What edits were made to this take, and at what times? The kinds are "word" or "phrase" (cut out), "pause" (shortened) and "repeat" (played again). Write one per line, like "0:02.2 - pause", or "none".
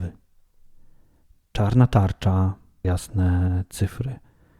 0:02.8 - word